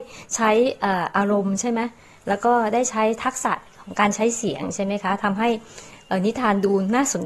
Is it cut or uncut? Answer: uncut